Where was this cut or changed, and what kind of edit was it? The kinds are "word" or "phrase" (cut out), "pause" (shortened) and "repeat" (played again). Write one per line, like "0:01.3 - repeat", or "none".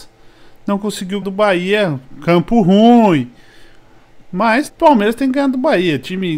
0:01.2 - word
0:04.7 - word